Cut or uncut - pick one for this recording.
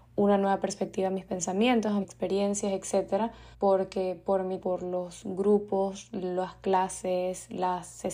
cut